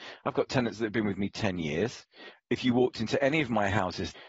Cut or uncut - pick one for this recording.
uncut